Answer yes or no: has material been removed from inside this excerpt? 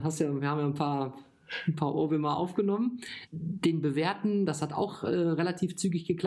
yes